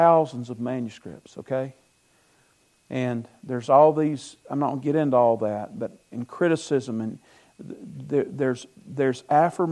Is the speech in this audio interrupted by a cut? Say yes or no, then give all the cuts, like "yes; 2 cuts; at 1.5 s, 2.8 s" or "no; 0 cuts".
no; 0 cuts